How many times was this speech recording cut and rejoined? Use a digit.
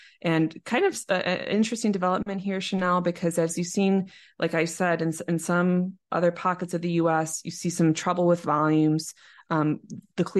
0